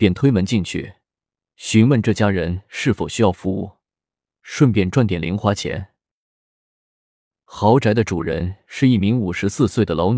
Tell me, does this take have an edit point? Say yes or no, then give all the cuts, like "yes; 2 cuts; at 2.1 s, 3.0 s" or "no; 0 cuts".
no; 0 cuts